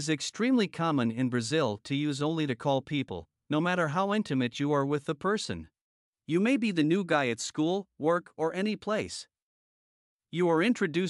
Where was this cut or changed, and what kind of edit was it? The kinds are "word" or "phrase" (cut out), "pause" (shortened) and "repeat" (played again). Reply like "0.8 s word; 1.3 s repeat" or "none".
2.5 s phrase; 6.0 s pause